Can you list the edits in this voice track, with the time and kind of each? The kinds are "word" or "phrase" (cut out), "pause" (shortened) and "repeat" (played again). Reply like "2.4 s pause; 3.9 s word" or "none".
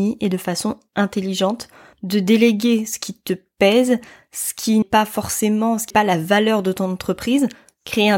4.8 s word; 5.9 s word

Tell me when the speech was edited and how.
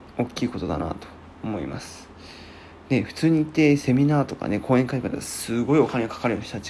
none

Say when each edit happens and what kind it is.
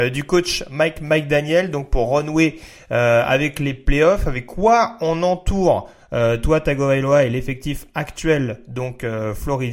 none

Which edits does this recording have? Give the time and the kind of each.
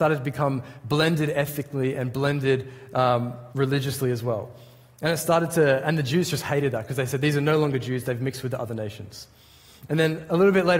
3.5 s pause

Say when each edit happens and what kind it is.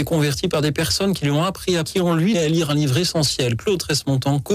1.9 s word; 2.3 s word

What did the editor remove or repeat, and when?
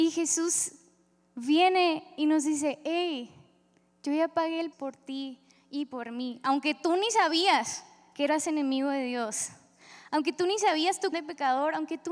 4.7 s word; 11.1 s word

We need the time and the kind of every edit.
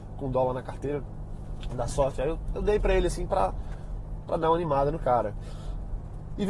none

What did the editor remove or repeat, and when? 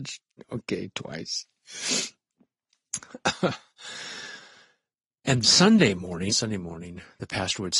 5.4 s word; 6.3 s phrase

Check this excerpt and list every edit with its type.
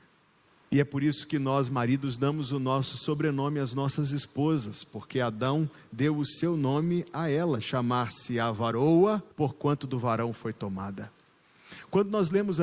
9.3 s pause

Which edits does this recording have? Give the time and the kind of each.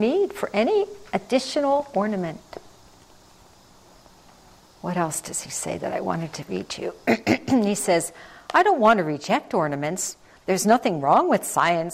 none

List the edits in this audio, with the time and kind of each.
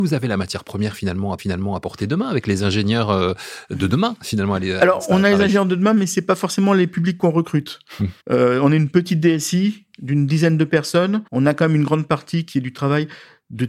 1.4 s repeat; 8.2 s pause; 11.3 s pause

